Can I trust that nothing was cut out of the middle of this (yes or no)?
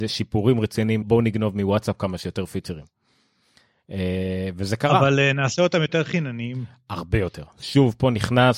no